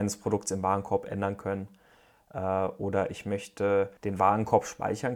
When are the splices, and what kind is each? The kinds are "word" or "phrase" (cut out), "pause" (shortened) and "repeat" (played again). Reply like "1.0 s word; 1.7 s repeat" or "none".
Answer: 4.0 s pause